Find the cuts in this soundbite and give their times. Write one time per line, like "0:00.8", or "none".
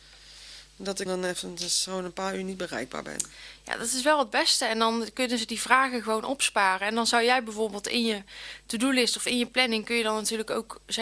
0:01.1